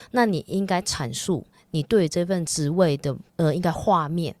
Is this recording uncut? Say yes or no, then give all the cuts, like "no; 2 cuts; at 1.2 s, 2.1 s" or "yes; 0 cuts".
no; 2 cuts; at 1.5 s, 3.3 s